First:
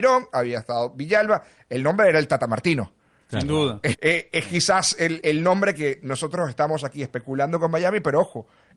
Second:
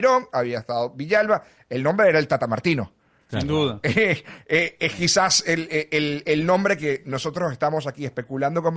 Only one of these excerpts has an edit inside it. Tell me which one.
first; 2 cuts; at 3.9 s, 5.2 s

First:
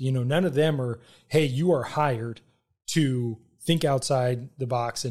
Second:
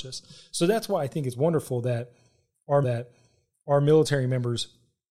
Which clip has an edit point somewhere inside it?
second; 1 cut; at 2.8 s

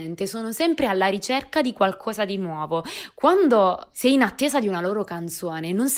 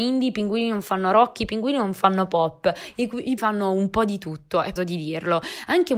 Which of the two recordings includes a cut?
second; 2 cuts; at 3.4 s, 4.8 s

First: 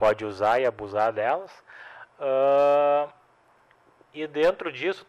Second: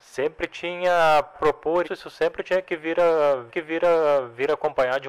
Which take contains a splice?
second; 3 cuts; at 1.3 s, 1.8 s, 3.5 s

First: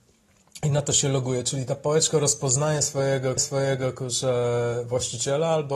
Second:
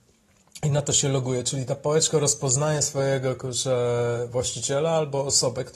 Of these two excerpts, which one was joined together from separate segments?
first; 1 cut; at 3.4 s

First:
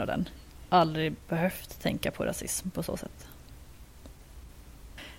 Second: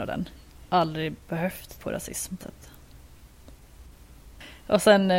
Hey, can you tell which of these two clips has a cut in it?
second; 2 cuts; at 1.8 s, 2.4 s

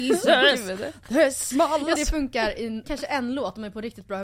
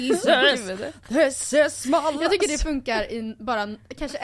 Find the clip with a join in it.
first; 3 cuts; at 1.5 s, 2.0 s, 2.8 s

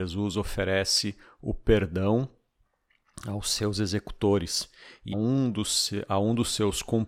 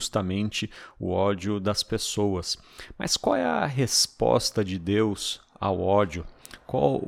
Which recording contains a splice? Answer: first; 1 cut; at 5.1 s

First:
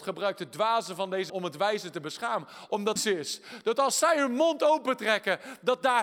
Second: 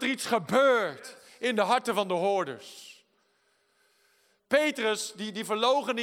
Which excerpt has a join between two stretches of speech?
first; 2 cuts; at 1.3 s, 3.0 s

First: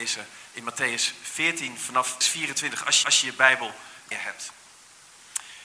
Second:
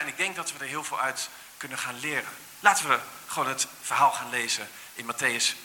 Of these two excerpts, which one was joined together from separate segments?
first; 3 cuts; at 2.2 s, 3.0 s, 4.1 s

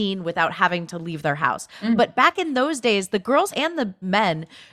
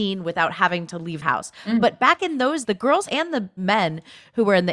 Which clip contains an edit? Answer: second; 2 cuts; at 1.2 s, 2.6 s

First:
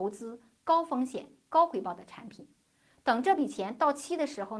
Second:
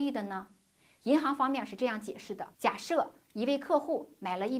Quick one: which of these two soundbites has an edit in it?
second; 1 cut; at 2.5 s

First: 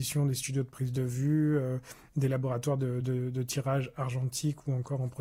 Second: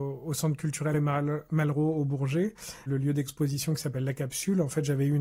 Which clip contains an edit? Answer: second; 2 cuts; at 0.9 s, 2.9 s

